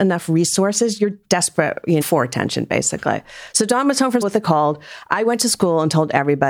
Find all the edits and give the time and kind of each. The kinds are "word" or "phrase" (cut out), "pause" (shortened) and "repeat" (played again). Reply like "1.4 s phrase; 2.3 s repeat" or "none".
1.2 s word; 2.0 s word; 4.2 s word